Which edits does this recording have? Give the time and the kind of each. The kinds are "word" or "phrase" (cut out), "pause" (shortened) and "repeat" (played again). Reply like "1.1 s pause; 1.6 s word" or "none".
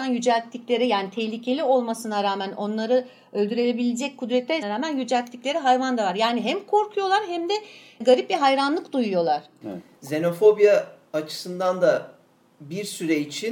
4.6 s phrase